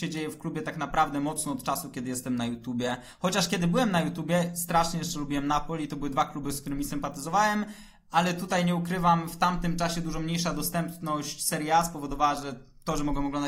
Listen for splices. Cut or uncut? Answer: uncut